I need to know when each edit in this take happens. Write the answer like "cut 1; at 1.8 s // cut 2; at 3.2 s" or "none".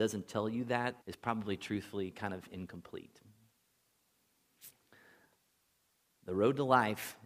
cut 1; at 1.0 s